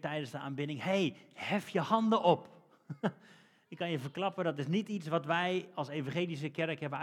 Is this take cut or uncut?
uncut